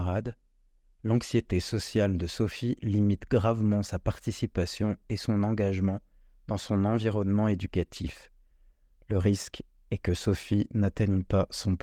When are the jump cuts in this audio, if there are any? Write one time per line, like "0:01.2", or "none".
none